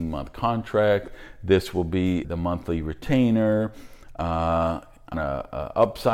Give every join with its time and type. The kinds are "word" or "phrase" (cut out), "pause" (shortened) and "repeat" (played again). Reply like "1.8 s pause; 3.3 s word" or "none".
2.2 s word; 5.1 s word

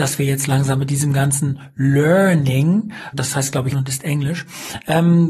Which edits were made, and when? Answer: 3.1 s word; 3.7 s word

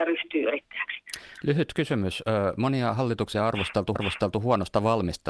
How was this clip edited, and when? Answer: 3.3 s word; 4.0 s repeat

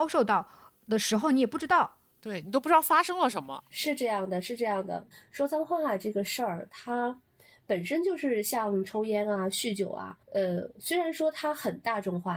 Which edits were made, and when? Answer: 10.2 s pause

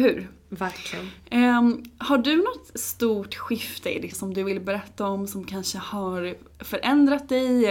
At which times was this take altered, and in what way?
4.1 s word

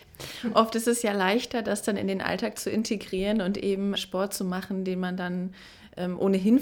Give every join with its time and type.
4.0 s word

